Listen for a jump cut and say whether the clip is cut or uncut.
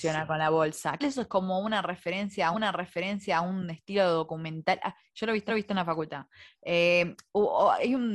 cut